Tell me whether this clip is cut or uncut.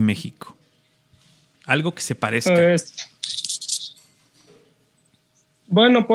uncut